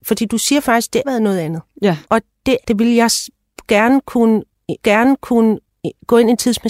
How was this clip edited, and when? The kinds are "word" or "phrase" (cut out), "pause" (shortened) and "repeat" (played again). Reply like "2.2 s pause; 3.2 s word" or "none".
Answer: 1.0 s word; 2.0 s pause; 2.6 s word; 4.8 s repeat